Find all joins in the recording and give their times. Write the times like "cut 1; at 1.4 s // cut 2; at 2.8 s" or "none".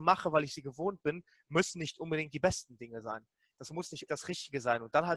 cut 1; at 4.1 s